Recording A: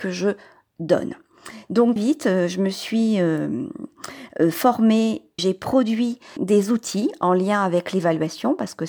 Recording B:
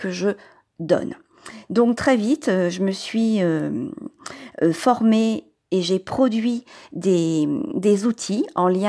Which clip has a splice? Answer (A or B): A